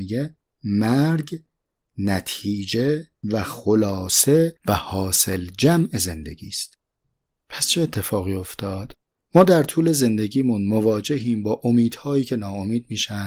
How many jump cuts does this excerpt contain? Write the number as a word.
zero